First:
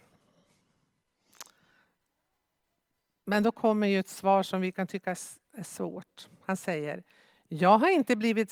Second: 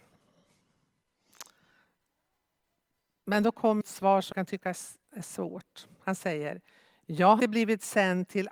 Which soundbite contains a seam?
second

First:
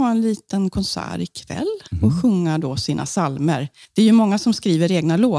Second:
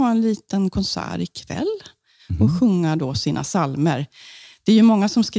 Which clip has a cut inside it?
first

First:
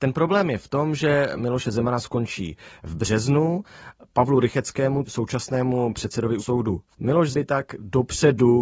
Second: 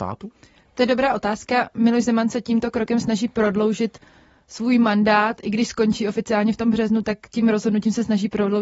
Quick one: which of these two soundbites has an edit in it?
first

